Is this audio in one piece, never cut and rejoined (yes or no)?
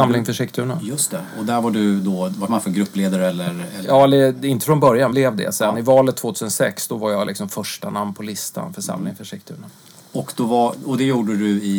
no